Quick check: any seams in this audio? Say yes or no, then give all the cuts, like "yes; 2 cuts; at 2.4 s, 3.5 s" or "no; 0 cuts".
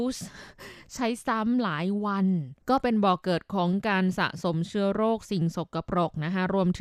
yes; 1 cut; at 2.6 s